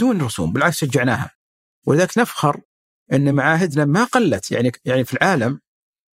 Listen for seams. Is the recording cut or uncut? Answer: uncut